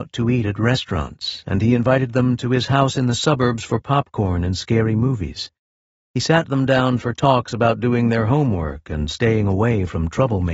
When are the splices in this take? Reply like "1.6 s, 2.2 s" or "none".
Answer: none